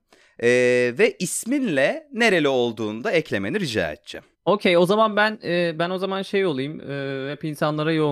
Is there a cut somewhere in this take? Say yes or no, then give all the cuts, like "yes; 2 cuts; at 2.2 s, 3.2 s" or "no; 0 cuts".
yes; 1 cut; at 4.3 s